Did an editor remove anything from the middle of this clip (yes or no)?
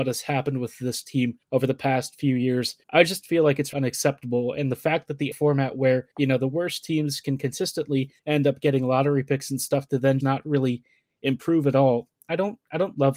yes